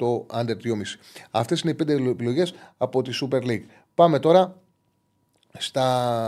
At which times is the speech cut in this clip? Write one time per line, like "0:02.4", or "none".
none